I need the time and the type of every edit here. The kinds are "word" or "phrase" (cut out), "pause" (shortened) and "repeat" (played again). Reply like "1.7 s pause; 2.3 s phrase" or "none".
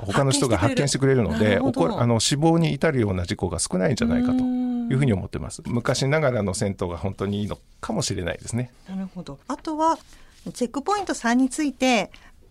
9.4 s pause